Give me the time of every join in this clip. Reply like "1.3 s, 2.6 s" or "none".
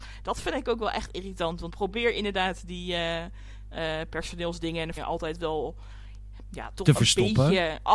1.7 s, 5.0 s